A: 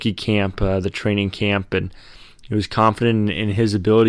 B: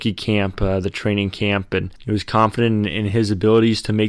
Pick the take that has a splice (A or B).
B